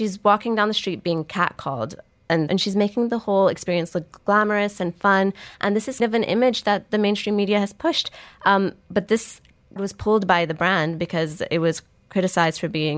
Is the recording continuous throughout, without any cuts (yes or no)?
no